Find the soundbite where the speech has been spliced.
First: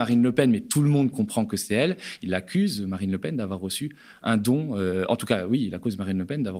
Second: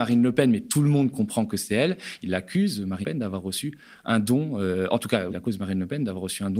second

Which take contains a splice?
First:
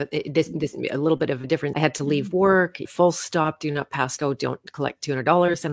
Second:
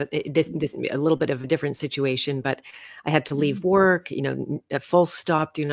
first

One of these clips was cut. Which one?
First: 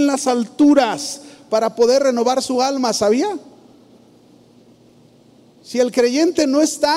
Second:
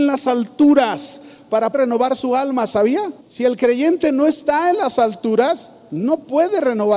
second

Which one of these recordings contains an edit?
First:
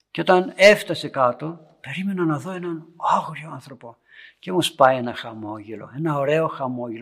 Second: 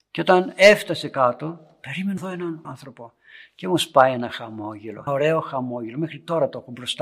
second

